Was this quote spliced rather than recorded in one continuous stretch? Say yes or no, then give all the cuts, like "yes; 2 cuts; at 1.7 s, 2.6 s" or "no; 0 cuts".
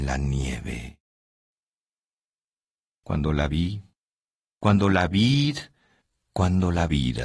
no; 0 cuts